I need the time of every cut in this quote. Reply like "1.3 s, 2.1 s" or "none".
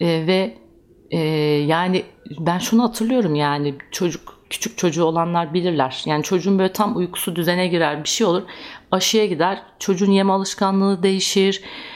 4.4 s